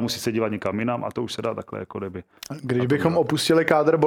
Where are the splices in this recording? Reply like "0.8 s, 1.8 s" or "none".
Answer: none